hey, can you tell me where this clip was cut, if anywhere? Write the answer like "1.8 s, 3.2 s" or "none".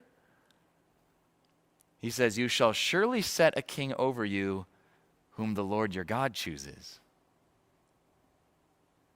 none

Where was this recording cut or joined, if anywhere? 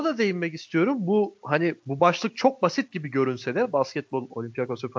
none

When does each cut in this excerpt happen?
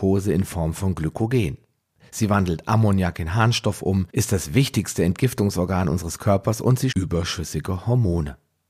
4.1 s, 6.9 s

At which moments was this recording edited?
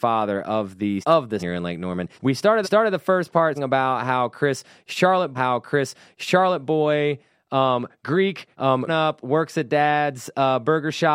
1.0 s, 1.4 s, 2.1 s, 2.6 s, 3.5 s, 5.3 s, 8.5 s, 8.9 s

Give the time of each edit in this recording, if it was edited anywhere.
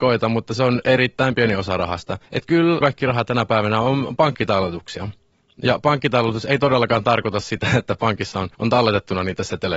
2.3 s, 2.8 s, 8.5 s

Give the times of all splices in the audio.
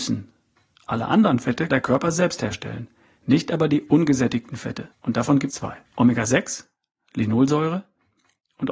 1.7 s, 4.9 s, 5.5 s, 5.9 s

